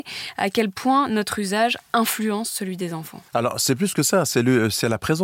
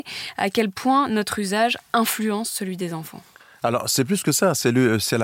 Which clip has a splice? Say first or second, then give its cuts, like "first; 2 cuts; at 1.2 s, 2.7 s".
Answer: first; 1 cut; at 3.3 s